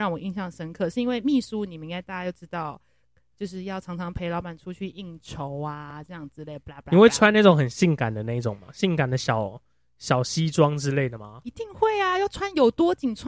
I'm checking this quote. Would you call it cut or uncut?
uncut